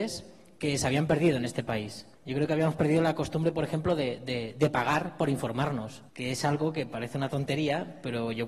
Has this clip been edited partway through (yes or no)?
yes